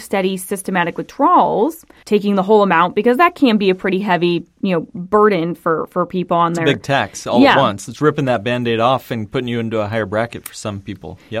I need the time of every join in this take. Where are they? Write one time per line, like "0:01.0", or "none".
0:02.0

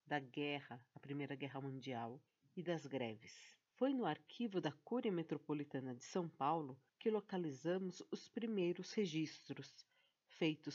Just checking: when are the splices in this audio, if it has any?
0:02.3
0:03.7
0:06.9

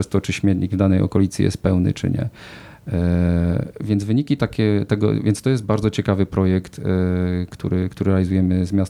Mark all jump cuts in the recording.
none

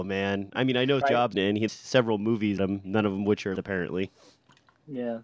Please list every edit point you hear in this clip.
0:01.0
0:01.3
0:01.7
0:02.6
0:03.6

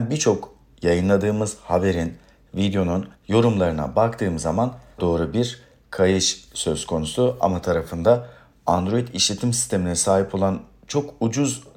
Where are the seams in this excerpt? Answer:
0:03.1
0:05.0
0:07.6

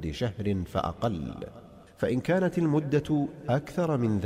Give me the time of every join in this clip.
0:01.9

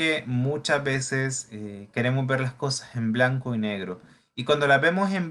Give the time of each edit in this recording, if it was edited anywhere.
none

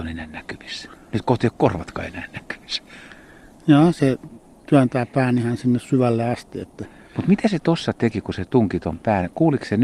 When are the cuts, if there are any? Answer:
none

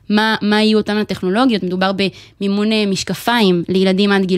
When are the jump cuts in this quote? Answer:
none

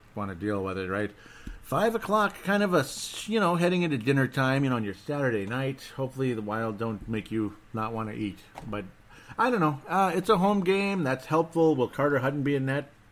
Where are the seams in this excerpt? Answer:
0:11.9

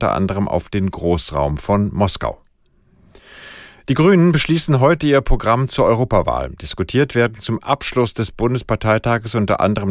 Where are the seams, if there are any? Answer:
none

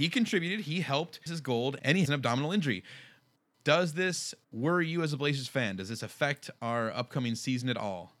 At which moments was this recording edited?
0:01.3
0:02.0

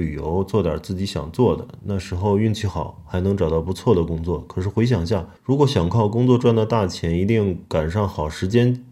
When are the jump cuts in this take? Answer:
0:05.4

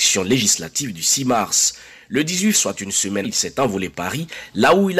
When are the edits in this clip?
0:02.5
0:03.2
0:03.9

